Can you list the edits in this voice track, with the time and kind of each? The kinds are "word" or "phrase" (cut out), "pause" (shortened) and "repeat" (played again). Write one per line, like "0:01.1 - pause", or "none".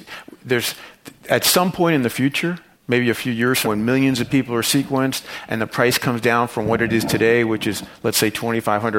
0:03.6 - word

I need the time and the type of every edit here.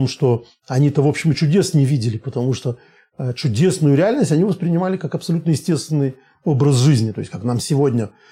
none

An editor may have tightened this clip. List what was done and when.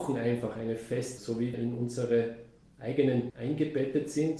0:01.2 - word
0:01.5 - word
0:03.3 - word

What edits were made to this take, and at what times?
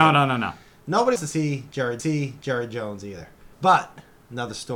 0:01.2 - word
0:02.0 - repeat
0:03.5 - pause

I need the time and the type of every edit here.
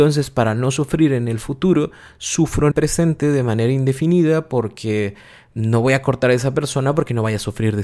0:02.7 - word

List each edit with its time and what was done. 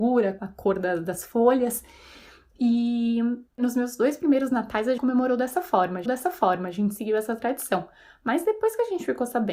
0:03.5 - pause
0:05.0 - word
0:06.1 - repeat

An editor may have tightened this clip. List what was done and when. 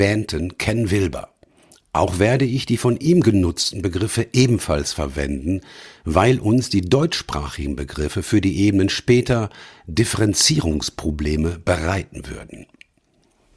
none

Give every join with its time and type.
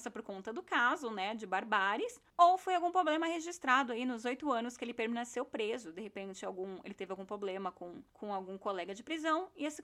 0:02.3 - pause
0:08.1 - pause

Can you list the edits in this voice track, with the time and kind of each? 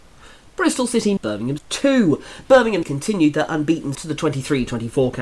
0:01.2 - word
0:01.6 - word
0:02.8 - word
0:03.9 - word

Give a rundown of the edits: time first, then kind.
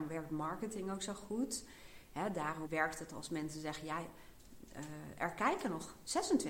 0:02.7 - word

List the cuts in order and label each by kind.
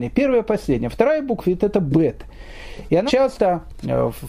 0:01.4 - word
0:03.1 - word

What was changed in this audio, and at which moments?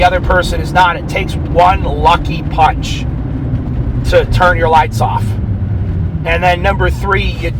none

